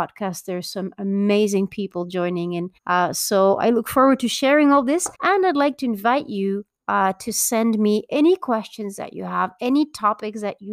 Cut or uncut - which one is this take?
cut